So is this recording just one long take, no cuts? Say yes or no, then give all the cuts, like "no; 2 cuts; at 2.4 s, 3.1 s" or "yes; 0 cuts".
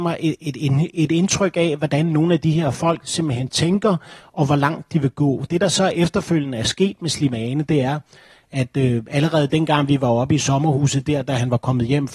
yes; 0 cuts